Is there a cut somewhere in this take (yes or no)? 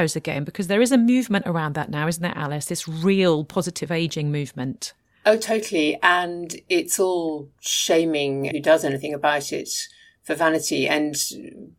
yes